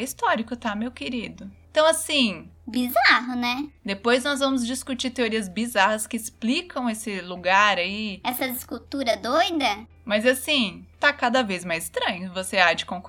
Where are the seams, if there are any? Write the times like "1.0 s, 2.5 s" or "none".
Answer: none